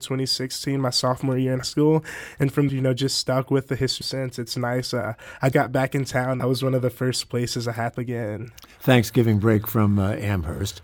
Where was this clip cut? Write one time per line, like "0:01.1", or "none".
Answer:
0:01.6
0:02.7
0:04.0
0:05.5
0:06.4
0:07.9